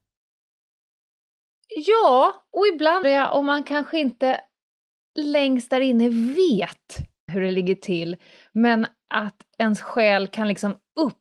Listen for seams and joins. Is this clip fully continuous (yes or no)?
no